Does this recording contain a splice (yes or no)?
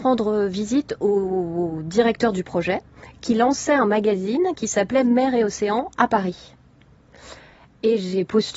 no